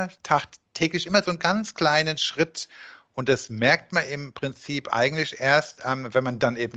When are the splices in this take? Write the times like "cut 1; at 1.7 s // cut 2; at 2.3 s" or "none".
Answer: none